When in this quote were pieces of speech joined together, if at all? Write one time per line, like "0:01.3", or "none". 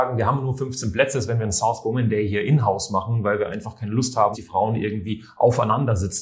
0:04.3